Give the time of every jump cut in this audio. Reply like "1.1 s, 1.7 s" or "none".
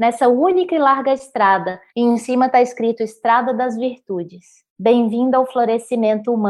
1.9 s, 4.7 s